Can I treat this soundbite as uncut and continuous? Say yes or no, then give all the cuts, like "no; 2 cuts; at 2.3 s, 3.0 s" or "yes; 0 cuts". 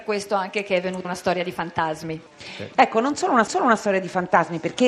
no; 3 cuts; at 1.0 s, 2.3 s, 3.5 s